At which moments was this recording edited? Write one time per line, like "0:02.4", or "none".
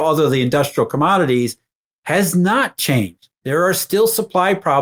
0:03.3